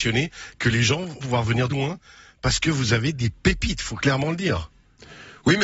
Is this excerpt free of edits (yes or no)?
no